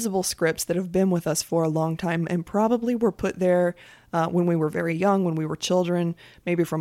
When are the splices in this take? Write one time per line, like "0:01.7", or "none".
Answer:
none